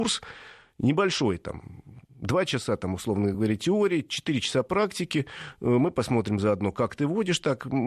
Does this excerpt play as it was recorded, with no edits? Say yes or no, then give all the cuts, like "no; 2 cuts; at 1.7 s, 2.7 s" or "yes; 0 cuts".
yes; 0 cuts